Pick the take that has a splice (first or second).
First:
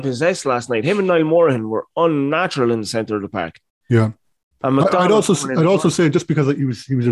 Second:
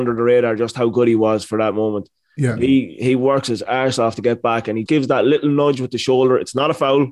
second